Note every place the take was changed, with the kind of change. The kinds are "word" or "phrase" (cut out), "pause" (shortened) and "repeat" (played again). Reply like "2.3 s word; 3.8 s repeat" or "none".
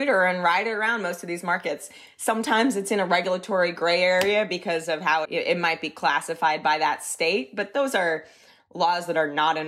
5.2 s word